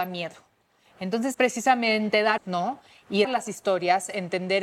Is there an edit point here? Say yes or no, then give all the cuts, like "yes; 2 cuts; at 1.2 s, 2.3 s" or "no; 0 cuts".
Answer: yes; 3 cuts; at 1.3 s, 2.4 s, 3.2 s